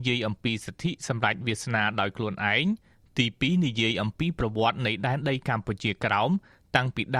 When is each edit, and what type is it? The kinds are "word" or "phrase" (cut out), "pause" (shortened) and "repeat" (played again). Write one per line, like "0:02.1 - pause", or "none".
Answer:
none

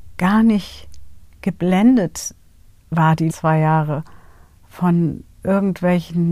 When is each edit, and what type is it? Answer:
0:03.3 - word

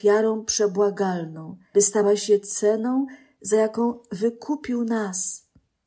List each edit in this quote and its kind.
0:01.7 - word

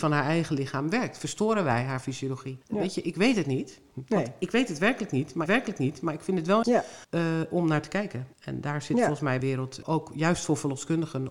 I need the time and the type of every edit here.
0:02.6 - pause
0:05.5 - repeat
0:06.6 - word
0:07.0 - pause
0:08.3 - pause
0:09.4 - phrase
0:09.8 - word

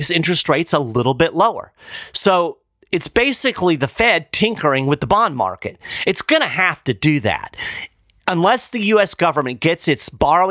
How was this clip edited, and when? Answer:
none

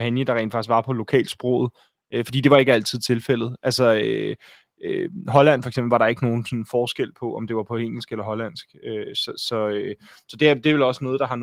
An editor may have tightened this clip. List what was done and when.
none

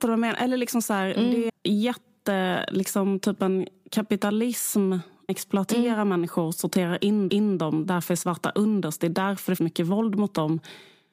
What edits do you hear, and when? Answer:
0:01.5 - phrase
0:05.3 - word
0:07.3 - repeat
0:09.6 - word

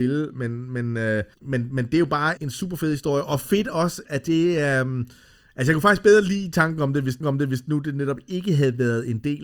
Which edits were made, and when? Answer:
0:01.3 - pause
0:02.4 - word
0:04.0 - word
0:07.2 - repeat

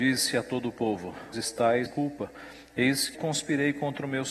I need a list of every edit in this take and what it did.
0:01.3 - word
0:01.9 - word
0:03.1 - word

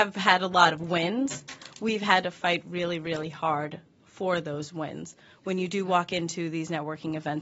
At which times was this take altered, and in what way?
none

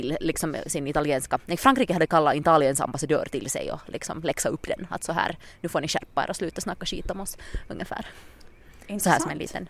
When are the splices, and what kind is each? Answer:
none

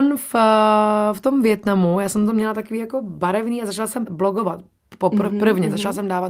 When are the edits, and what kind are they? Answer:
0:04.1 - word

